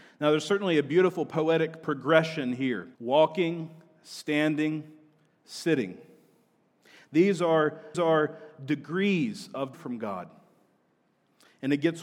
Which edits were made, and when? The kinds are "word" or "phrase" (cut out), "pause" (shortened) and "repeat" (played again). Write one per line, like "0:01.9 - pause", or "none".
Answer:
0:02.9 - pause
0:07.9 - repeat
0:09.7 - word